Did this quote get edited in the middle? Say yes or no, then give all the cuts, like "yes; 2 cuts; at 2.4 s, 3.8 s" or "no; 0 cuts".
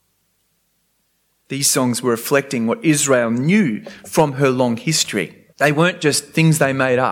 yes; 1 cut; at 5.5 s